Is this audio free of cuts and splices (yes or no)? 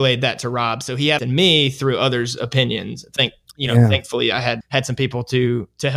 no